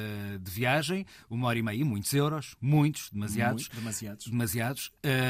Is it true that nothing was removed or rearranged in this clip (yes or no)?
yes